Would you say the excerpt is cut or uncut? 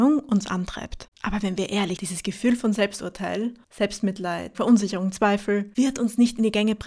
cut